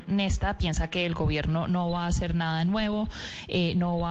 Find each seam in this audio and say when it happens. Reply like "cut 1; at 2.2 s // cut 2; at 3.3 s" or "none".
none